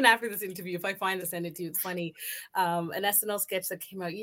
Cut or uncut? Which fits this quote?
cut